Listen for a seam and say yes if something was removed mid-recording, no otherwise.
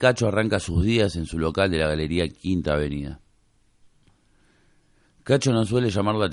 no